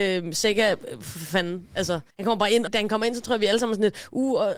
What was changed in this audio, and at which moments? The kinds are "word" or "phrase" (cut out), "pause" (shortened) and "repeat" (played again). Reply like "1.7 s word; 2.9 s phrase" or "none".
2.1 s pause; 2.7 s word